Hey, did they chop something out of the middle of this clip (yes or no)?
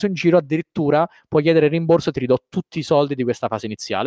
no